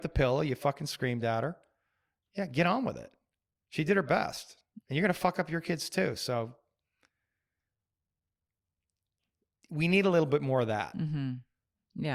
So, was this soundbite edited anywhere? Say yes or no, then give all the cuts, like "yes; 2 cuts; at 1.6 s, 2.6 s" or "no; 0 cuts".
no; 0 cuts